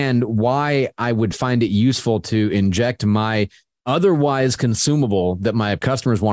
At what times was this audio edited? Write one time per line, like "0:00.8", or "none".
none